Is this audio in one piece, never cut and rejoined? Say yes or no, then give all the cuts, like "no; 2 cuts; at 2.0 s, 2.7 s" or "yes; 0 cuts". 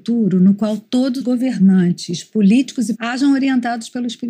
no; 2 cuts; at 1.2 s, 2.9 s